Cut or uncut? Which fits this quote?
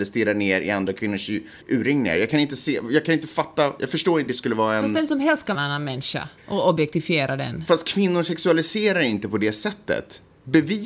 cut